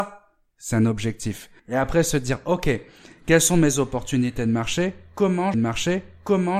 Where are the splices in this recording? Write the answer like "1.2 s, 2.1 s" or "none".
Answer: 1.6 s, 5.5 s